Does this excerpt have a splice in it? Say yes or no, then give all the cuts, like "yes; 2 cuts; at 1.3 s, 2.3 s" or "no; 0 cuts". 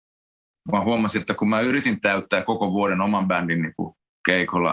no; 0 cuts